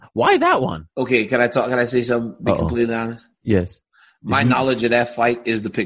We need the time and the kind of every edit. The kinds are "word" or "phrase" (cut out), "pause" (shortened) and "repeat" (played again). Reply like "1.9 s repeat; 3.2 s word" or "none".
0.9 s pause